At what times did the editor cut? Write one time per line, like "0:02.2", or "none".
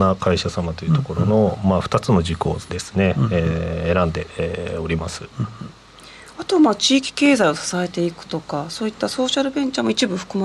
none